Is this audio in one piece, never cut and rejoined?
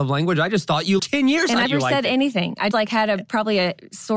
no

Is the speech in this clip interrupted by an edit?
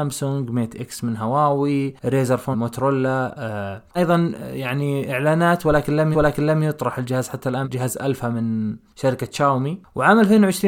yes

